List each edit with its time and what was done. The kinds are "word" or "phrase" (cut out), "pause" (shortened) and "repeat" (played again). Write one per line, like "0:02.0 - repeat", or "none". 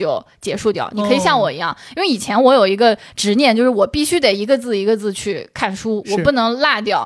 none